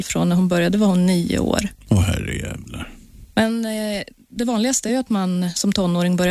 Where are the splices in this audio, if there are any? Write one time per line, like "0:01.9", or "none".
none